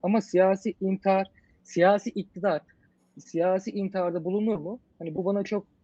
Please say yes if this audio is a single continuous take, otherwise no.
yes